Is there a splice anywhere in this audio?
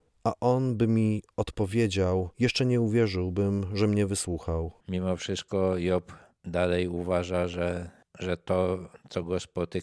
yes; 2 cuts; at 2.3 s, 4.8 s

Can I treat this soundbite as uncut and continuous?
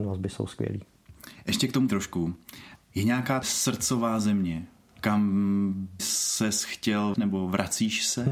no; 4 cuts; at 1.9 s, 3.4 s, 6.0 s, 7.1 s

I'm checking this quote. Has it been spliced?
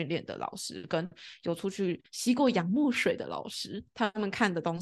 yes; 1 cut; at 2.1 s

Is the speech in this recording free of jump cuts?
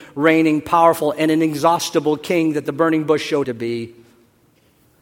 no; 1 cut; at 3.4 s

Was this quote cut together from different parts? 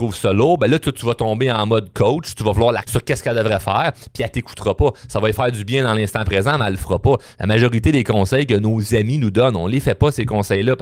yes; 1 cut; at 2.8 s

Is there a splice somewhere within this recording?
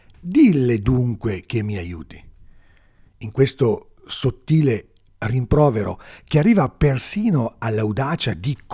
no; 0 cuts

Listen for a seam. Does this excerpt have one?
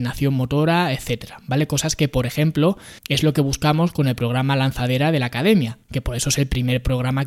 yes; 2 cuts; at 3.0 s, 5.8 s

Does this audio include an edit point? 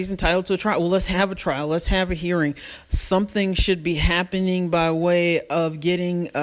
no; 0 cuts

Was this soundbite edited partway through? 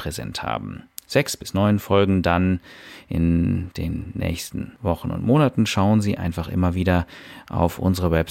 no; 0 cuts

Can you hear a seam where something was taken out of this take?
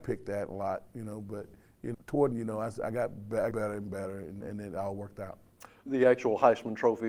yes; 5 cuts; at 1.9 s, 2.3 s, 3.5 s, 4.4 s, 5.9 s

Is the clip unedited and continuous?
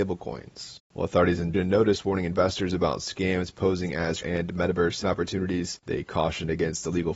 no; 3 cuts; at 1.5 s, 4.2 s, 5.0 s

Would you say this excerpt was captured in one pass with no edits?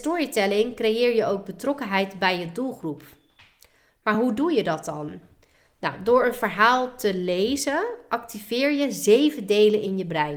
yes; 0 cuts

